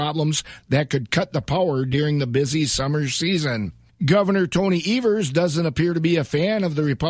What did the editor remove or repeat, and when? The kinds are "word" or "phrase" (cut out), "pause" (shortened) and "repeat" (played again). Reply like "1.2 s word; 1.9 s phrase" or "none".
3.9 s pause

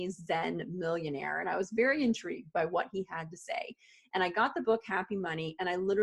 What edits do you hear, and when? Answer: none

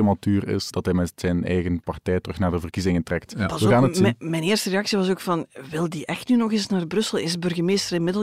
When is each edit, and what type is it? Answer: none

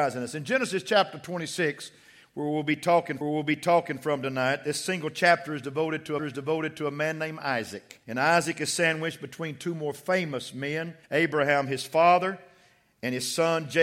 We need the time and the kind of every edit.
3.2 s repeat; 6.2 s repeat; 8.0 s pause; 11.0 s pause

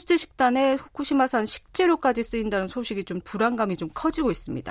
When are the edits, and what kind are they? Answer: 3.2 s word

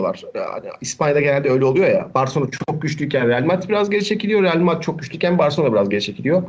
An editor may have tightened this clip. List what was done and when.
none

